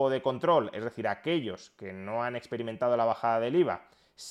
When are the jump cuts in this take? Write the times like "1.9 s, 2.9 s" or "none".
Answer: none